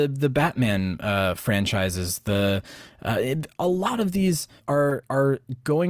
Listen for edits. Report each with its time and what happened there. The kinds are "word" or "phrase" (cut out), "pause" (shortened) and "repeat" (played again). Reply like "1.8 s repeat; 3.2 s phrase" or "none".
4.6 s pause